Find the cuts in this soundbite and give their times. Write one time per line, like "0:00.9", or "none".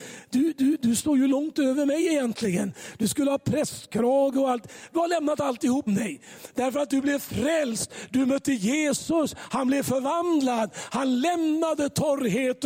0:05.9